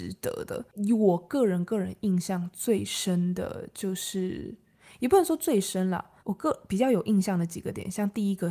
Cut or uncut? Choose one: cut